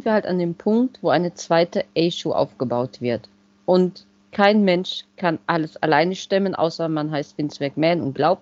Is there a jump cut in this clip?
no; 0 cuts

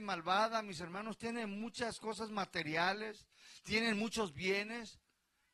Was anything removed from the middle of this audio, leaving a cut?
no; 0 cuts

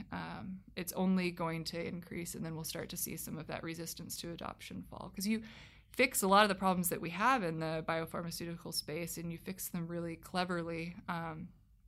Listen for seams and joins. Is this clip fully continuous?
yes; 0 cuts

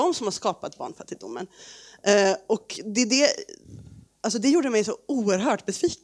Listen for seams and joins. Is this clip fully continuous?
yes; 0 cuts

